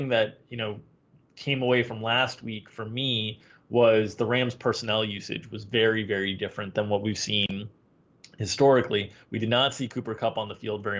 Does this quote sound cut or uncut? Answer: uncut